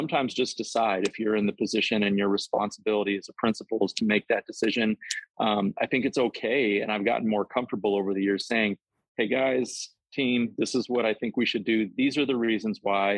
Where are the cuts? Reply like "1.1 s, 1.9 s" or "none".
none